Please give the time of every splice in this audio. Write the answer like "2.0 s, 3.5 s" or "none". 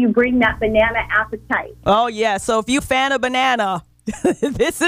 2.8 s